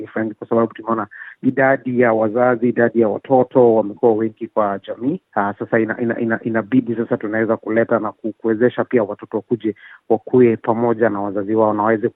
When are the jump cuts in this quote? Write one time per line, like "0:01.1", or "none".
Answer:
0:05.3